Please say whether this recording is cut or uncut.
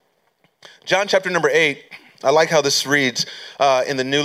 uncut